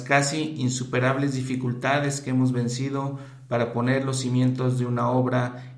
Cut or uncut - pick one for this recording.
uncut